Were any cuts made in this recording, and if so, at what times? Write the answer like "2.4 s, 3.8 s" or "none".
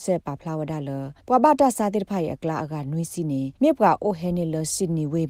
1.2 s, 3.6 s